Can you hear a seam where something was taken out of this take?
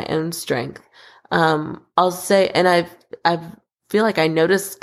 no; 0 cuts

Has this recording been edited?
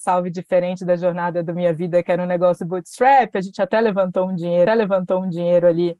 yes; 1 cut; at 4.7 s

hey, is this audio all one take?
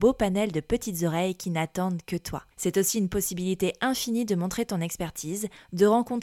no; 1 cut; at 2.5 s

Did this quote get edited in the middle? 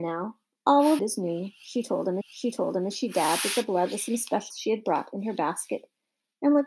yes; 3 cuts; at 1.0 s, 2.2 s, 4.5 s

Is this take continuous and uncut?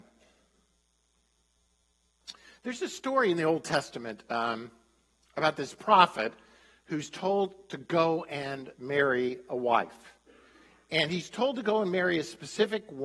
yes; 0 cuts

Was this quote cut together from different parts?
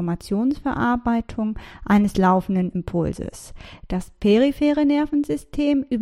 no; 0 cuts

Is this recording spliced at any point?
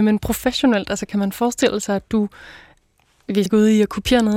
yes; 1 cut; at 3.5 s

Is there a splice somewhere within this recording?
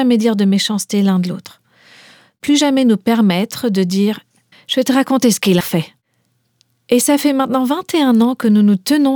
yes; 2 cuts; at 4.5 s, 5.6 s

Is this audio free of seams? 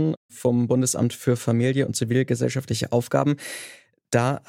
yes; 0 cuts

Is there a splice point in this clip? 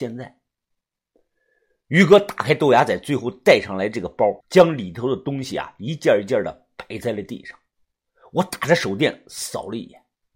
yes; 1 cut; at 4.4 s

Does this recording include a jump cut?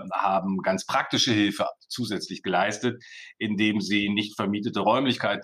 no; 0 cuts

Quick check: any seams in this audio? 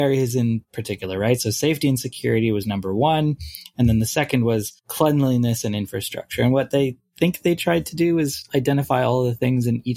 yes; 1 cut; at 4.8 s

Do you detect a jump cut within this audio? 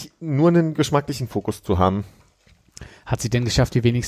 no; 0 cuts

